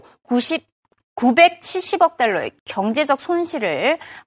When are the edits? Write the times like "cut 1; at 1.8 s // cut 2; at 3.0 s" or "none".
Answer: cut 1; at 2.6 s